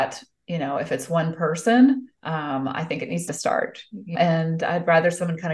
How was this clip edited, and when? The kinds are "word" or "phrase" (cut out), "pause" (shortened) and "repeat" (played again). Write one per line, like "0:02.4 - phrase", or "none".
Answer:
0:02.1 - pause
0:03.3 - phrase
0:04.1 - word